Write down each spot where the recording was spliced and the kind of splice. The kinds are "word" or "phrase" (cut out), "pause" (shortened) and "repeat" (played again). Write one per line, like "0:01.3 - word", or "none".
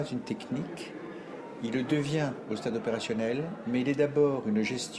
none